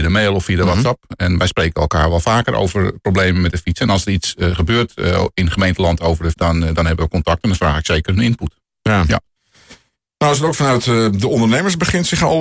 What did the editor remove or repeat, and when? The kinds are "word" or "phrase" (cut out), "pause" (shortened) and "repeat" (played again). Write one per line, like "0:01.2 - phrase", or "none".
0:06.3 - word